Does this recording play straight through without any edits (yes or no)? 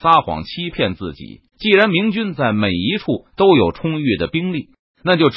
no